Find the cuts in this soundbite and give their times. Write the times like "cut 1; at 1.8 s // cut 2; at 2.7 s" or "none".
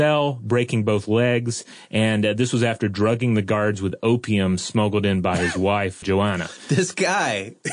cut 1; at 6.0 s